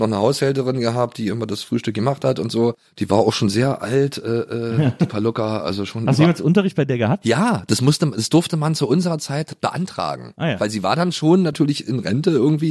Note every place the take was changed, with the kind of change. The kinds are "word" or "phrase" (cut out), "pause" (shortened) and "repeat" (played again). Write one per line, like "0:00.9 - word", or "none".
0:02.9 - pause